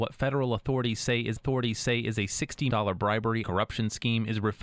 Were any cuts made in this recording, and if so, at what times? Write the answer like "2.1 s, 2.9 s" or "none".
1.4 s, 2.7 s, 3.4 s